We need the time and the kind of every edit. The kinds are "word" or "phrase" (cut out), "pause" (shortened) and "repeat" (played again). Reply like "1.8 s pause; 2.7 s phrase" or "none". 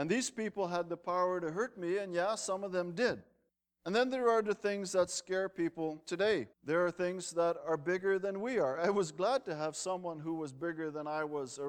3.5 s pause; 6.5 s pause